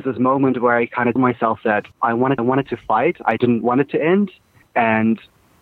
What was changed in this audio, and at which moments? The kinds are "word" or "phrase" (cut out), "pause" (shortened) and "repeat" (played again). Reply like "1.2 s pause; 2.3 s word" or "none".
1.2 s word; 1.9 s pause; 2.4 s repeat; 3.4 s word; 4.6 s pause